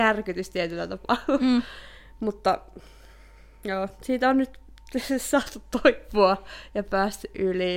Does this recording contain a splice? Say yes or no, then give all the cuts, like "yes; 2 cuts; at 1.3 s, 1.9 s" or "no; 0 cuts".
no; 0 cuts